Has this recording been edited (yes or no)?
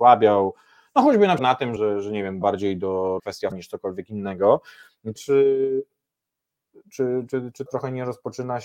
yes